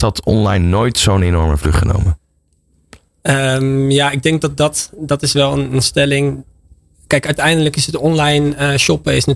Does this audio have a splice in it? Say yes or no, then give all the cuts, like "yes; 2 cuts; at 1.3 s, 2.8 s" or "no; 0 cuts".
no; 0 cuts